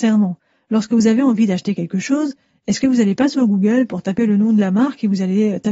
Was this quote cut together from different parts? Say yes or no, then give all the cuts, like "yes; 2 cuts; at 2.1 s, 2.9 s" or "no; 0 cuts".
no; 0 cuts